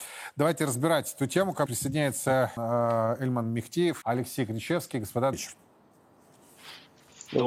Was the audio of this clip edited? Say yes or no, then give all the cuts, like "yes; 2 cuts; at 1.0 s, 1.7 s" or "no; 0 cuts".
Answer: yes; 4 cuts; at 1.7 s, 2.6 s, 4.0 s, 5.3 s